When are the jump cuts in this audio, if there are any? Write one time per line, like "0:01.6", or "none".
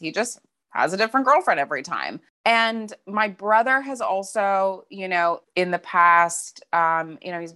0:02.3
0:05.4

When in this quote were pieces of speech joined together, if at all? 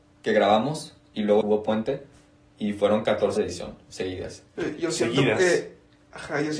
0:01.4
0:03.4

